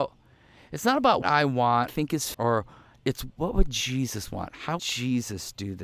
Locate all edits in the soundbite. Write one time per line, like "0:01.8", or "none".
0:01.2
0:01.9
0:02.3
0:03.3
0:04.8